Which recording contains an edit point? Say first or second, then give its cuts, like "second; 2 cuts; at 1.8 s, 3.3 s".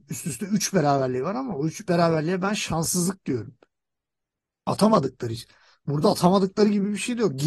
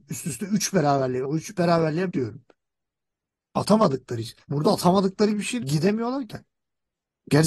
second; 6 cuts; at 1.2 s, 2.1 s, 4.4 s, 5.3 s, 5.6 s, 6.3 s